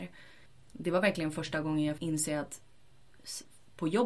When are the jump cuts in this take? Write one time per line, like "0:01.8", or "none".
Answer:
0:02.0